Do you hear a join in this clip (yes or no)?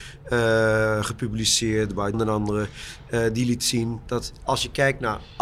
yes